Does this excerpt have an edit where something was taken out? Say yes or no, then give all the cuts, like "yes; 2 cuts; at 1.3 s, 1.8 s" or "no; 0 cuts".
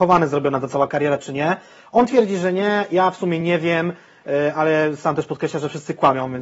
no; 0 cuts